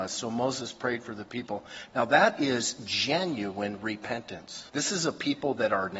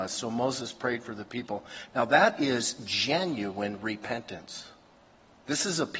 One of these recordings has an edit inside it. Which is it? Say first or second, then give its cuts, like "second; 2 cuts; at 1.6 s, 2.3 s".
first; 1 cut; at 4.7 s